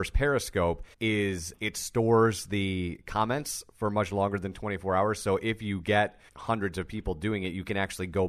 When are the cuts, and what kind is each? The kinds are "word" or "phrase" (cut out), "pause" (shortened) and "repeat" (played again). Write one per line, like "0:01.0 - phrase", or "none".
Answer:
0:00.9 - pause
0:06.3 - pause